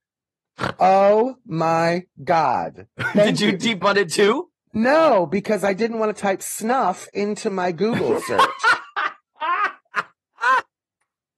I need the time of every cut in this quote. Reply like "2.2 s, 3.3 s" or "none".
3.8 s